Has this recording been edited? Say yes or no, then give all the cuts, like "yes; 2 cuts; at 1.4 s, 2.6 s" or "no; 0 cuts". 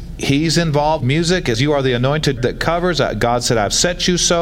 yes; 3 cuts; at 1.0 s, 1.5 s, 2.4 s